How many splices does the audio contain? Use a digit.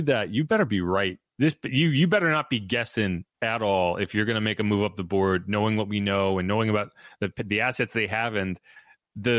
2